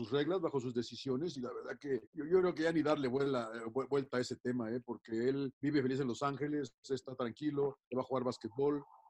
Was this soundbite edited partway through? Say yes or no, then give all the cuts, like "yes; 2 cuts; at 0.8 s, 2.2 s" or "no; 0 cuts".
yes; 3 cuts; at 2.1 s, 5.5 s, 7.8 s